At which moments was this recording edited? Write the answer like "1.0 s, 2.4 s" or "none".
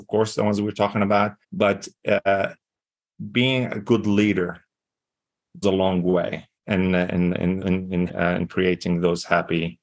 1.4 s, 5.6 s, 6.6 s, 7.6 s, 8.1 s